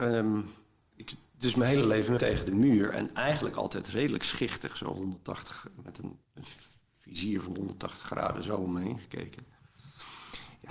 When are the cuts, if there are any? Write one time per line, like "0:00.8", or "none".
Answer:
0:02.2
0:06.2